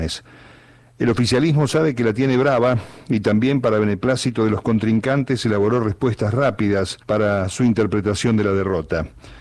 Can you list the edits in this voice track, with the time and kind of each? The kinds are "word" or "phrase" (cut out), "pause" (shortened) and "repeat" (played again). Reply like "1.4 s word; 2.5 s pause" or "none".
7.0 s pause